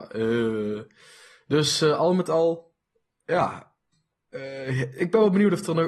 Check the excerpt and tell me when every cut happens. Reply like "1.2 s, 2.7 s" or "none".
none